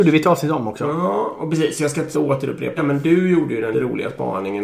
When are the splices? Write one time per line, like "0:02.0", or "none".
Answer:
0:02.1
0:02.8
0:03.7